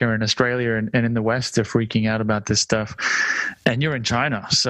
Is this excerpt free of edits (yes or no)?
yes